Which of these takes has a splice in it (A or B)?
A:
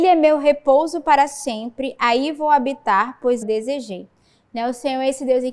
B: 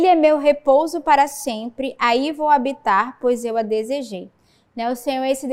A